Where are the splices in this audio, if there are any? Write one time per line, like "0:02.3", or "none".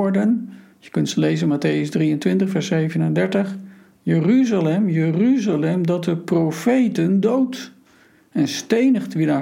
none